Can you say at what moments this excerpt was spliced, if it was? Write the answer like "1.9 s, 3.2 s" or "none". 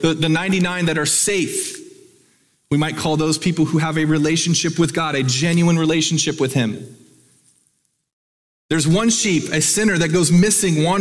none